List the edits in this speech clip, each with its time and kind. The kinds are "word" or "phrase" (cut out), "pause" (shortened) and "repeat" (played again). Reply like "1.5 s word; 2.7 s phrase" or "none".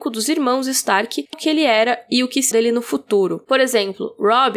1.3 s word; 2.5 s word

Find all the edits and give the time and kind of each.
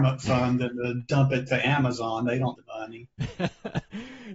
2.5 s word

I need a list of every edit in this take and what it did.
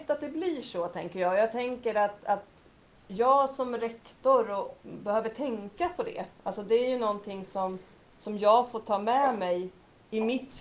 none

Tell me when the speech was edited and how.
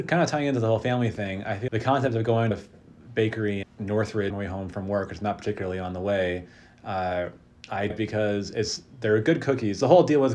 1.7 s word; 2.5 s word; 3.6 s word; 4.3 s word; 7.9 s word

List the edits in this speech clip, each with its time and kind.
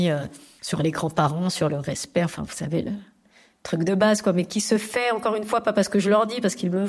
none

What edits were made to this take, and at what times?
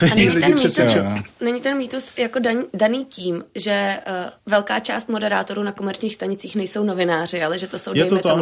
4.4 s pause

